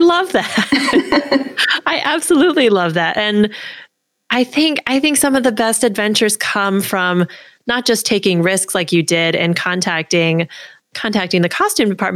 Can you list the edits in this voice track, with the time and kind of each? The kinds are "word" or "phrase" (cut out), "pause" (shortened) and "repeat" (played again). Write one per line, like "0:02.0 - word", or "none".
none

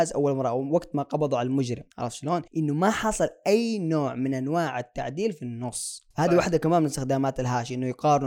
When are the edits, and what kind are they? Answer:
0:01.9 - pause
0:02.5 - pause
0:06.1 - pause

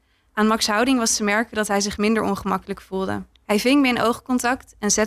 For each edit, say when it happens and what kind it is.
0:03.3 - pause

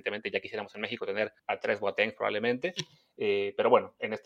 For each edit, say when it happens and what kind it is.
0:01.4 - pause

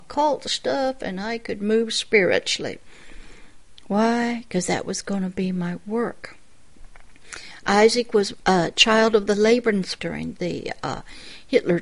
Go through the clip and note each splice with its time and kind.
0:10.0 - word

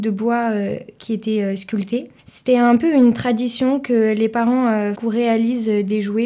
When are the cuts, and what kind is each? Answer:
0:02.2 - pause
0:05.0 - word

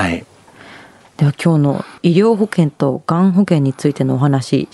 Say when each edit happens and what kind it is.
0:02.0 - pause

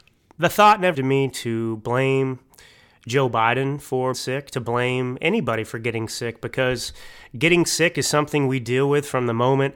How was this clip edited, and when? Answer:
0:00.9 - word
0:04.1 - word

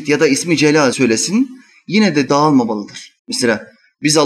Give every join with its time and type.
0:00.9 - word
0:02.3 - word
0:03.2 - pause

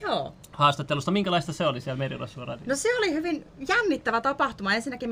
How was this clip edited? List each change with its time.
none

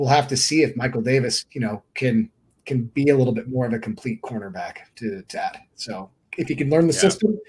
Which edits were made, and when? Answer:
0:05.3 - word

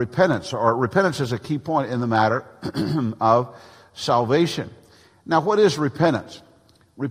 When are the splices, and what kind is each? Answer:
none

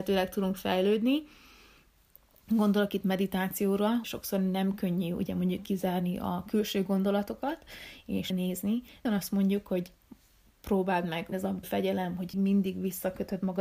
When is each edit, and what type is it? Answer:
0:04.0 - word
0:08.3 - word
0:09.0 - word
0:11.3 - word
0:11.6 - word
0:12.3 - word

